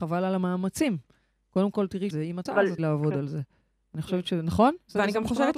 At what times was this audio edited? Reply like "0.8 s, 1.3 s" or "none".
2.1 s, 2.5 s, 2.8 s